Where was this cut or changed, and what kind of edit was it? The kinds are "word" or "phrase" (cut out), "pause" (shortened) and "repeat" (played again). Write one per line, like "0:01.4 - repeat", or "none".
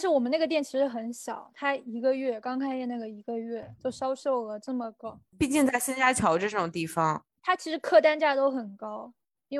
0:03.8 - pause